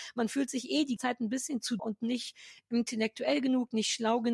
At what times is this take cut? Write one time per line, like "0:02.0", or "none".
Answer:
0:01.0
0:01.8